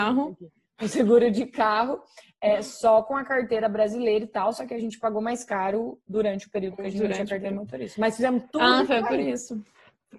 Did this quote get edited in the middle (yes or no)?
no